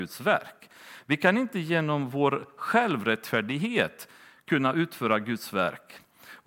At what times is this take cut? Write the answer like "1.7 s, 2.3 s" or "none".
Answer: none

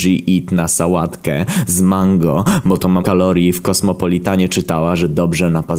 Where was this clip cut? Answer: 3.0 s

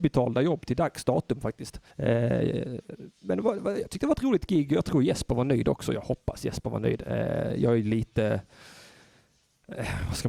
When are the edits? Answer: 1.9 s

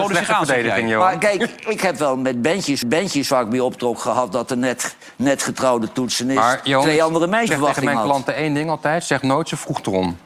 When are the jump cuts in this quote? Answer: 2.8 s, 7.5 s

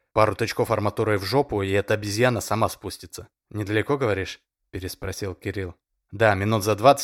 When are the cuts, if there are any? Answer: 3.4 s

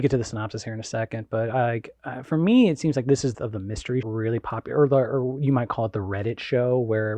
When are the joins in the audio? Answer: 3.3 s, 4.0 s

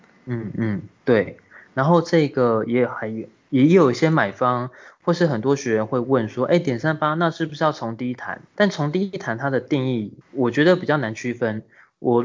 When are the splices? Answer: 8.5 s, 10.2 s

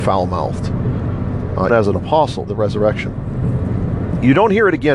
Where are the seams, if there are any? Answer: 1.7 s, 2.5 s

